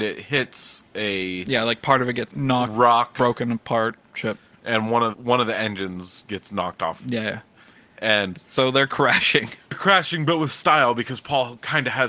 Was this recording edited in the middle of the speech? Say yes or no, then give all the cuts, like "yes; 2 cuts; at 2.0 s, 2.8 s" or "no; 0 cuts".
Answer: yes; 2 cuts; at 2.3 s, 5.1 s